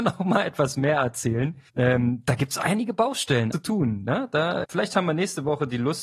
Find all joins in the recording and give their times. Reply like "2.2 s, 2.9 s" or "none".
1.7 s, 3.5 s, 4.6 s